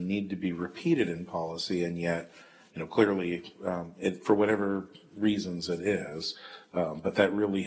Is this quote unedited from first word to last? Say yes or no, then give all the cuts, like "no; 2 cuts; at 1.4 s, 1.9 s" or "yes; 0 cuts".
yes; 0 cuts